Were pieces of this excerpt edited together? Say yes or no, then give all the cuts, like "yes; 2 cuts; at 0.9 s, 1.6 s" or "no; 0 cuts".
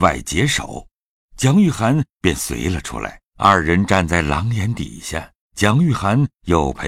yes; 2 cuts; at 3.3 s, 5.4 s